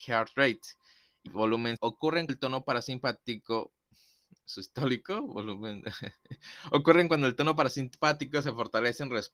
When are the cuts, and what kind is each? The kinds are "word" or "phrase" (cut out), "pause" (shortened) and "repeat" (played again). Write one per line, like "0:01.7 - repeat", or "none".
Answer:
0:01.3 - word
0:01.8 - word
0:02.3 - word

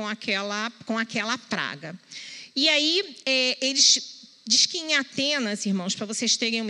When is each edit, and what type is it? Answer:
0:03.2 - pause

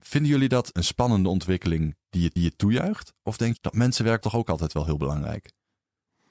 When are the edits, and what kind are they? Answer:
0:02.4 - repeat
0:04.2 - word

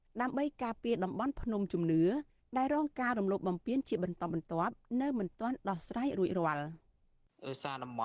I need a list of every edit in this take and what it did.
none

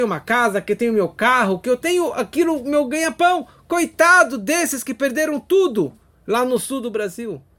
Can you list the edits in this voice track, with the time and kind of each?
none

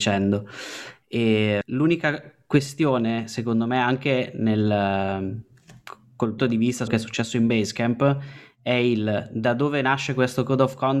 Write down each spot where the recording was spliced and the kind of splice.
0:01.6 - word
0:06.4 - word
0:06.9 - word

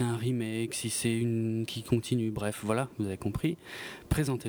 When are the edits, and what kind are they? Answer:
0:01.7 - word

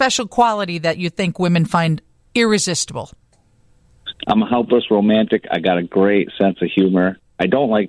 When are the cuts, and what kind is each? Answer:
none

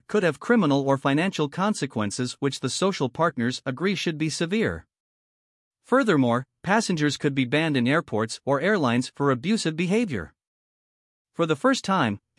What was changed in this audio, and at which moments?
none

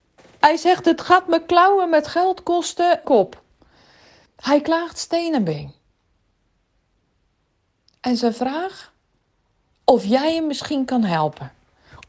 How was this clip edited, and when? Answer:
0:03.0 - phrase

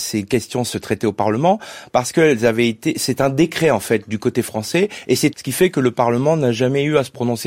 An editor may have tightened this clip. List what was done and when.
0:05.3 - phrase

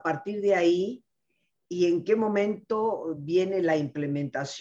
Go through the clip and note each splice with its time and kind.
none

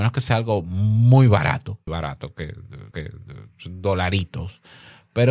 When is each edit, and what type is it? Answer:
0:01.9 - word
0:02.9 - repeat

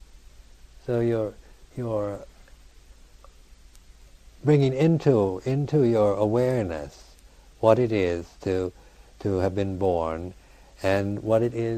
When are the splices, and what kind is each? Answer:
0:01.7 - word

